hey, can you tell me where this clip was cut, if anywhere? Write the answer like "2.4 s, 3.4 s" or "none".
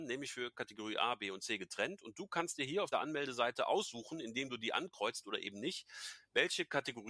2.9 s